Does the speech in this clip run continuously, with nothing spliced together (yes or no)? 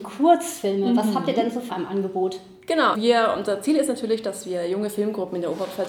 no